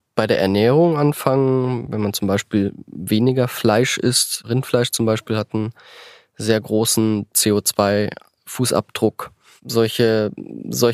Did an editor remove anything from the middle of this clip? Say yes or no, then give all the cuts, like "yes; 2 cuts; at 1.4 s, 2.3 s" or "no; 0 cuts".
no; 0 cuts